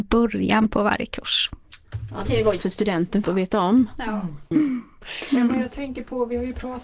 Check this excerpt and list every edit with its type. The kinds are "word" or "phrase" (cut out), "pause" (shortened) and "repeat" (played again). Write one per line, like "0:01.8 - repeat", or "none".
0:02.2 - word
0:02.6 - word
0:03.2 - word

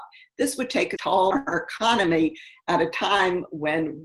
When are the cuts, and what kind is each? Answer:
0:01.0 - word
0:01.3 - word

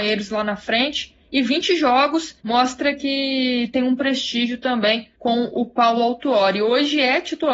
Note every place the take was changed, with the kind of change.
0:02.4 - pause
0:05.1 - pause

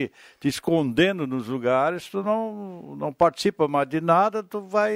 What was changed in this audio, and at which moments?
none

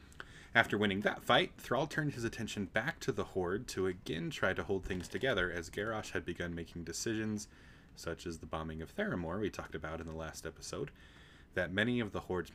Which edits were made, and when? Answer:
none

